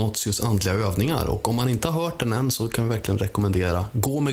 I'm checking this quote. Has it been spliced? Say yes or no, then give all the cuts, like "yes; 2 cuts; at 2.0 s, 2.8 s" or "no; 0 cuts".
no; 0 cuts